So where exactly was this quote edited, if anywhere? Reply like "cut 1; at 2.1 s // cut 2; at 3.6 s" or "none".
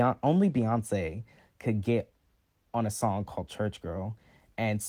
none